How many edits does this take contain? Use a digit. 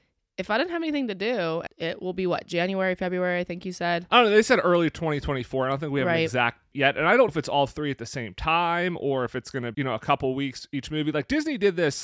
4